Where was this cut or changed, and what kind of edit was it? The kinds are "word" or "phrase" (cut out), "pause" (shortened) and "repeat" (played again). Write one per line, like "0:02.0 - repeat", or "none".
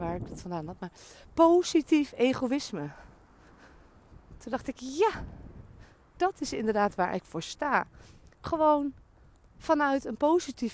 0:08.3 - pause

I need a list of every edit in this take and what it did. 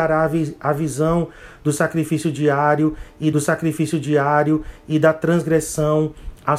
0:03.3 - repeat

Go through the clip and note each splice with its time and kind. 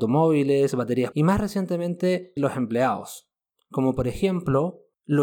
0:01.1 - word
0:02.4 - word

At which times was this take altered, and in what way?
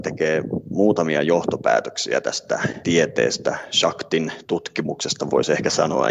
0:02.8 - word

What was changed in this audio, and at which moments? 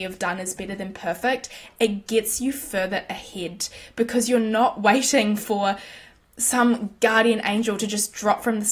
none

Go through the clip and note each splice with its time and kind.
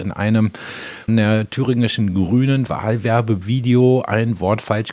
0:01.1 - word
0:02.7 - word

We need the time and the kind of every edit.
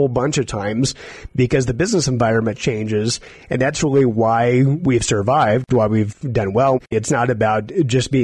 0:06.9 - pause

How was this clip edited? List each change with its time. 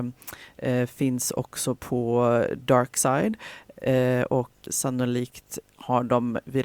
0:04.6 - word

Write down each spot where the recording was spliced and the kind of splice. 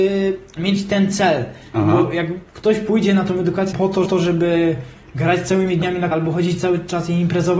0:02.5 - pause
0:03.7 - word
0:04.0 - repeat
0:06.1 - word

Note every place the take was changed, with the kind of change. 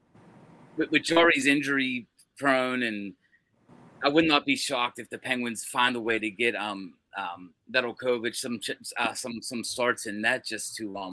none

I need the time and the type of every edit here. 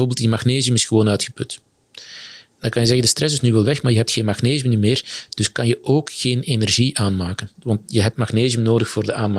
0:07.5 - pause

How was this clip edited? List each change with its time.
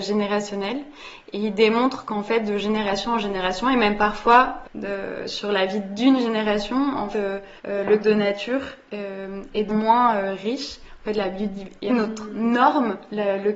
0:04.6 - word
0:07.1 - word
0:07.6 - pause
0:08.0 - word
0:09.7 - phrase
0:11.9 - phrase

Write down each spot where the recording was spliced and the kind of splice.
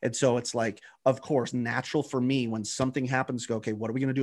0:01.5 - word

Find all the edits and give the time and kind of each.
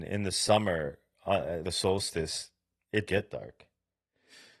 0:01.6 - word
0:03.1 - word

